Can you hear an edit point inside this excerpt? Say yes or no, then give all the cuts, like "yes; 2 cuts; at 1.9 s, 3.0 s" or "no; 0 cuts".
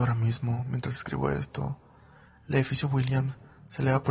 no; 0 cuts